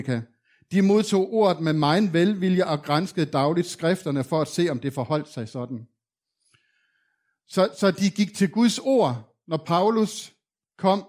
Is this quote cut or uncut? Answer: uncut